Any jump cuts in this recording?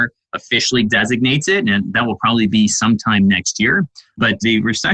no; 0 cuts

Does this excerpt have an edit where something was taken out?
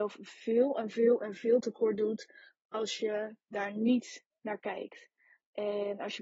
no; 0 cuts

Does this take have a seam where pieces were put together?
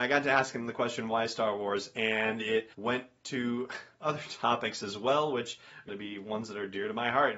yes; 2 cuts; at 2.7 s, 5.9 s

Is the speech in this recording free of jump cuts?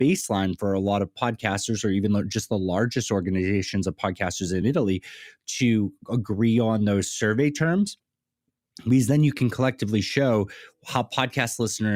yes; 0 cuts

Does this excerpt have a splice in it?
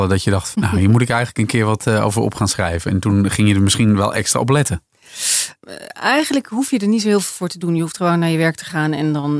no; 0 cuts

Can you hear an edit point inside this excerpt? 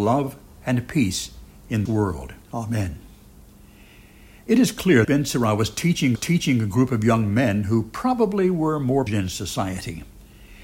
yes; 5 cuts; at 1.9 s, 2.4 s, 5.0 s, 6.2 s, 9.1 s

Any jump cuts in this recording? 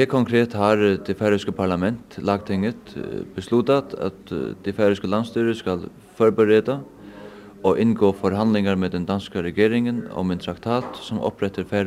no; 0 cuts

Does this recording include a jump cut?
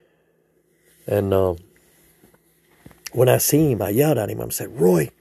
no; 0 cuts

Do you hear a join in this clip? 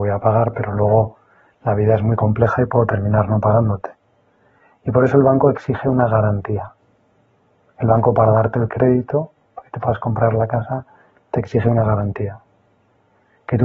no; 0 cuts

